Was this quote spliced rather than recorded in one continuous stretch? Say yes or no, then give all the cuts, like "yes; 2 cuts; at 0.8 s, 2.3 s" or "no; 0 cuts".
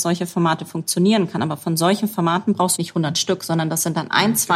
yes; 1 cut; at 2.8 s